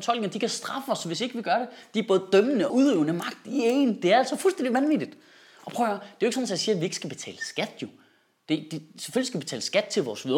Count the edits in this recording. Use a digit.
1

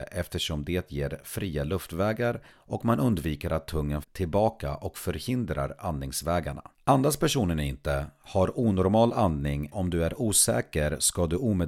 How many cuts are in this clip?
4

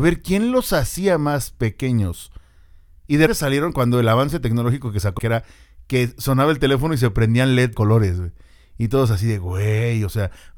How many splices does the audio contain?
3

